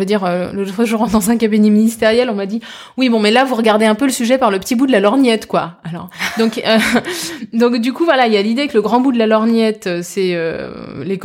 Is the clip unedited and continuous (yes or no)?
yes